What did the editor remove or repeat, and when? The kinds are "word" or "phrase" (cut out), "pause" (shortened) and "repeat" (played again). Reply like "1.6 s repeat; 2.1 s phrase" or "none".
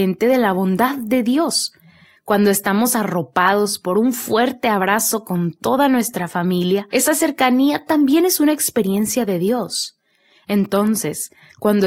none